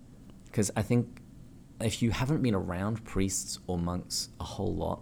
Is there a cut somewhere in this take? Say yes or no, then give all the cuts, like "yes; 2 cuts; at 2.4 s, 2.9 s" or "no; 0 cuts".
no; 0 cuts